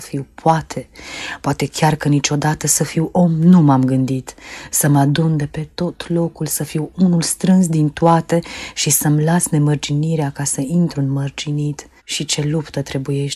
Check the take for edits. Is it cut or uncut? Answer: cut